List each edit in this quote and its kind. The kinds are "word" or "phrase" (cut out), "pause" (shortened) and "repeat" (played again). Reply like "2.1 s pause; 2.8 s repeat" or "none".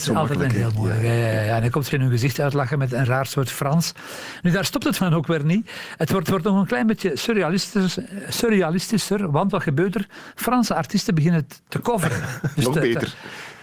1.9 s word; 5.0 s word; 6.2 s repeat